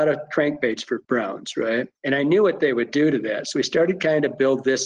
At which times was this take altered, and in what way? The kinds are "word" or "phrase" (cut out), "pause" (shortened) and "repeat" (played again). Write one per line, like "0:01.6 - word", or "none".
0:01.0 - pause
0:02.0 - pause